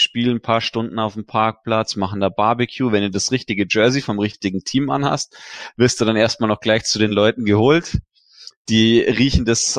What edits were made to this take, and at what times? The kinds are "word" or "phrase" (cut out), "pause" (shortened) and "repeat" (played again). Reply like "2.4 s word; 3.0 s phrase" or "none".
none